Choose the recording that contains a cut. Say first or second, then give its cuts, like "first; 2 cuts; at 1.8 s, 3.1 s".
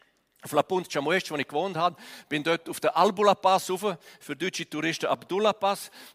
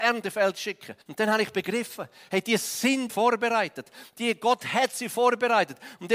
second; 2 cuts; at 1.0 s, 3.1 s